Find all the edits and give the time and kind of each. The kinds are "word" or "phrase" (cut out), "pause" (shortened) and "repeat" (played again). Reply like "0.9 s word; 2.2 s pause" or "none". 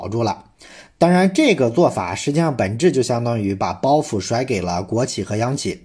none